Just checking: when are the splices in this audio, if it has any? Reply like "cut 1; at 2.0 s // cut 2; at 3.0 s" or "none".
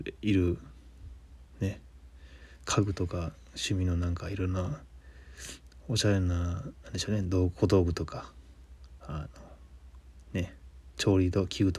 cut 1; at 1.5 s